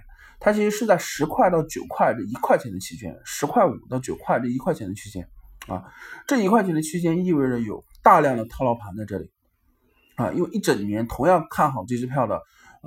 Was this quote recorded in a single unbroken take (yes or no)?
yes